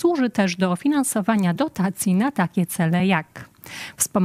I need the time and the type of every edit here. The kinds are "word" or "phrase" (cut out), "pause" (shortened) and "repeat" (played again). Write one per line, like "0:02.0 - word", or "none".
none